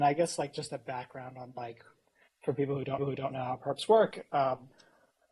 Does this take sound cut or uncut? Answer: cut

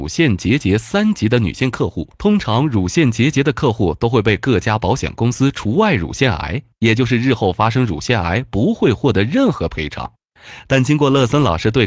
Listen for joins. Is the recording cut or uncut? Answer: cut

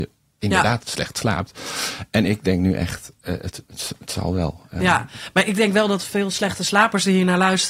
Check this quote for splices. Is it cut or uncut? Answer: uncut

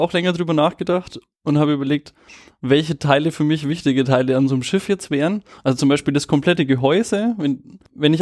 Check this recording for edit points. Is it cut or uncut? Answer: uncut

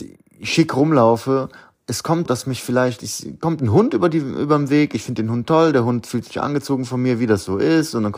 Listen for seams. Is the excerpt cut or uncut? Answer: cut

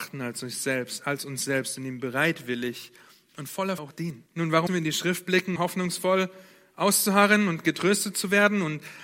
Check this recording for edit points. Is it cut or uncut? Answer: cut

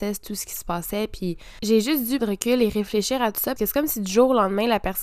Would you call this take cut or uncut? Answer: cut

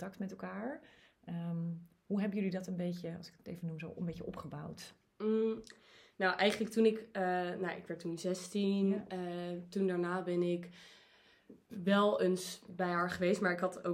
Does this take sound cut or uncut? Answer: uncut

